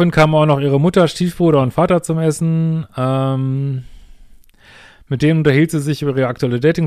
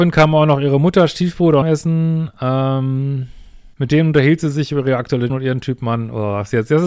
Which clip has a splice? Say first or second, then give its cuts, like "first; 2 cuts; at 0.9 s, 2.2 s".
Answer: second; 3 cuts; at 1.6 s, 3.7 s, 5.3 s